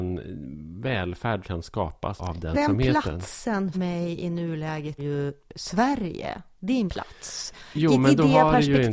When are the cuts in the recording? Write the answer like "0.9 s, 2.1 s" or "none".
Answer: 1.4 s, 2.2 s, 2.5 s, 3.7 s, 5.0 s, 6.9 s